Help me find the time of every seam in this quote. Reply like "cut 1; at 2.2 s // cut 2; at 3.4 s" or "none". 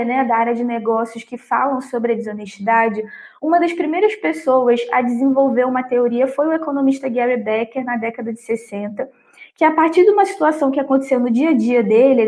none